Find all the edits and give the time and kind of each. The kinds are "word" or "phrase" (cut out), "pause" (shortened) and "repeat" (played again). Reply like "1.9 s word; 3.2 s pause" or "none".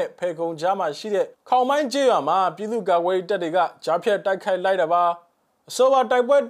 1.3 s pause